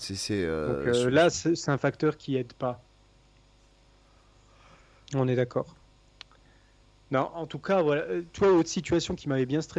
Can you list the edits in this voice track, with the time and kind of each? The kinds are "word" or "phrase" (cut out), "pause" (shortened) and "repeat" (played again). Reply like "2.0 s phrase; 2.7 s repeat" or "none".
none